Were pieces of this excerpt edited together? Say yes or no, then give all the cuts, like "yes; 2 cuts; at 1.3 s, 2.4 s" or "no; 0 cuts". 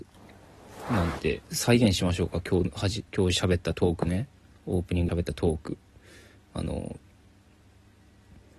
yes; 4 cuts; at 1.4 s, 3.1 s, 4.3 s, 5.1 s